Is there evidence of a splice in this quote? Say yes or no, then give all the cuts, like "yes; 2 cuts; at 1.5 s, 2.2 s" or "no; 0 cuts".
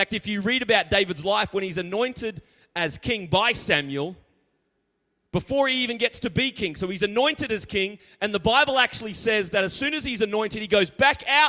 no; 0 cuts